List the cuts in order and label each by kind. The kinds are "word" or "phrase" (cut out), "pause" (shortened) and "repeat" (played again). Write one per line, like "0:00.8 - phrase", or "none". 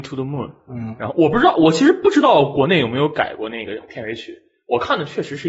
none